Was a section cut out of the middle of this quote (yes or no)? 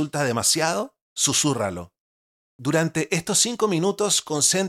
no